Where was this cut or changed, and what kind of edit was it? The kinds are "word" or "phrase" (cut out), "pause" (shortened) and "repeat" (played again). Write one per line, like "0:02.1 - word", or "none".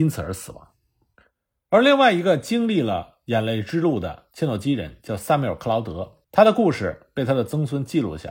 0:06.2 - pause